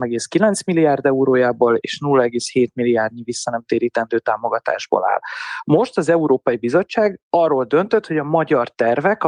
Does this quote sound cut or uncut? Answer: cut